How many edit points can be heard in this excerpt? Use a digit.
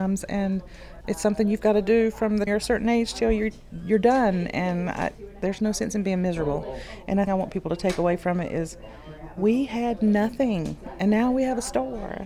3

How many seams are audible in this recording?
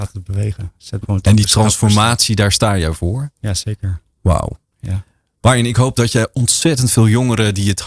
1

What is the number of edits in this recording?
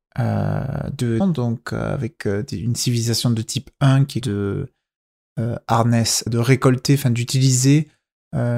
3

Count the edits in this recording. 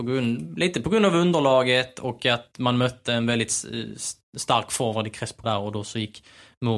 1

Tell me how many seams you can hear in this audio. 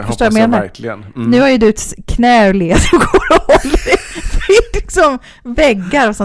0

